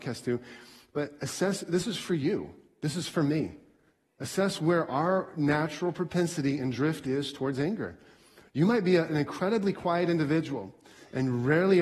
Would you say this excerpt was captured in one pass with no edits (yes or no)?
yes